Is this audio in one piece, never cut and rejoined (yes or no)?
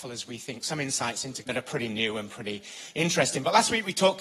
no